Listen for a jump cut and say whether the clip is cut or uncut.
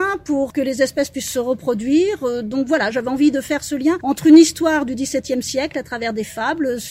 uncut